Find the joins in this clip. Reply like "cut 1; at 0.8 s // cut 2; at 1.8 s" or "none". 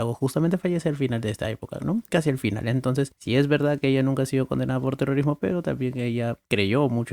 none

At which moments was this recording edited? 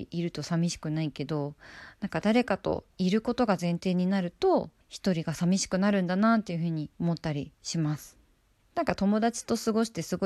cut 1; at 2.9 s // cut 2; at 4.8 s // cut 3; at 6.9 s // cut 4; at 7.5 s // cut 5; at 8.6 s

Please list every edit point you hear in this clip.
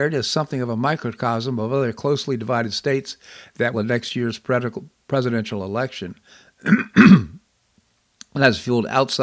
cut 1; at 3.7 s

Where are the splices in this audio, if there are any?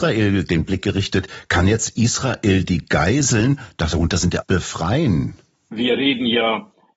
cut 1; at 4.4 s

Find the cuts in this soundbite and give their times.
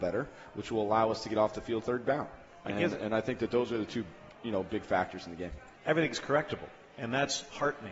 cut 1; at 1.8 s // cut 2; at 5.8 s

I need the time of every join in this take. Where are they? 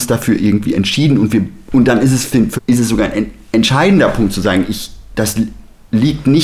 cut 1; at 2.6 s

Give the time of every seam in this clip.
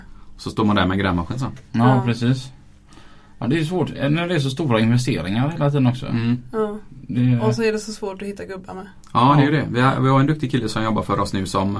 none

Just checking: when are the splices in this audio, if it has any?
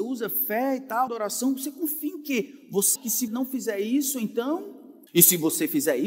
cut 1; at 1.1 s // cut 2; at 3.0 s // cut 3; at 3.3 s // cut 4; at 5.1 s

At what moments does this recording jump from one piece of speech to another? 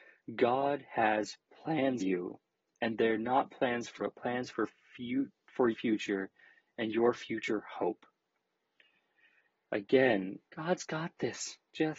cut 1; at 2.0 s // cut 2; at 4.0 s // cut 3; at 5.7 s // cut 4; at 10.4 s

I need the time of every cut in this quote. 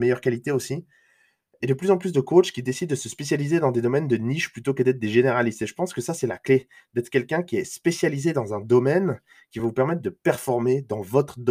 none

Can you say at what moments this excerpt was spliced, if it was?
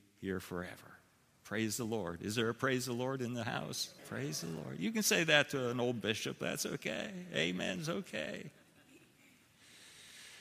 cut 1; at 4.0 s

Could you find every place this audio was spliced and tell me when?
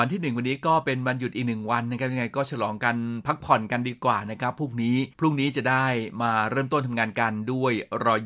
cut 1; at 5.1 s

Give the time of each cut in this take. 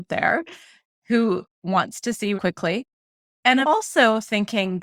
cut 1; at 2.4 s // cut 2; at 3.6 s

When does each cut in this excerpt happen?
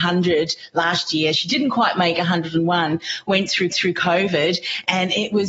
cut 1; at 3.7 s

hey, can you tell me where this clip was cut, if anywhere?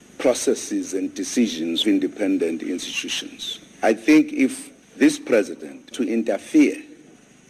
cut 1; at 1.8 s // cut 2; at 4.8 s // cut 3; at 5.9 s

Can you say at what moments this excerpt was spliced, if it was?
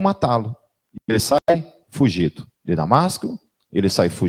cut 1; at 2.6 s

